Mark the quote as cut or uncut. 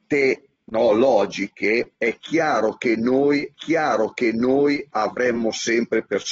cut